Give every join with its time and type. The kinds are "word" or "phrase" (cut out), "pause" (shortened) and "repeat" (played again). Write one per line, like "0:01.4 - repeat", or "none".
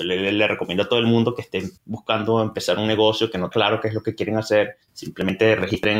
0:01.8 - pause
0:03.5 - word